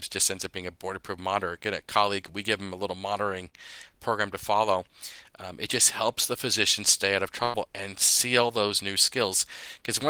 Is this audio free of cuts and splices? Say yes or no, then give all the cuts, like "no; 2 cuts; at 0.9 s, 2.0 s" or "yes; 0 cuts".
yes; 0 cuts